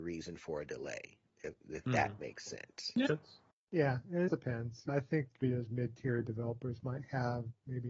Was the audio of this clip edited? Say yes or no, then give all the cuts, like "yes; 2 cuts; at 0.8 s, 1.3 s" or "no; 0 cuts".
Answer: yes; 5 cuts; at 3.1 s, 3.5 s, 4.3 s, 4.9 s, 5.4 s